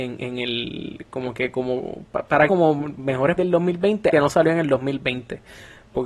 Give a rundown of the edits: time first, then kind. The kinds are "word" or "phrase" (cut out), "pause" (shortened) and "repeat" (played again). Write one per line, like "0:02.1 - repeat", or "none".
0:02.5 - phrase
0:03.4 - word
0:04.1 - word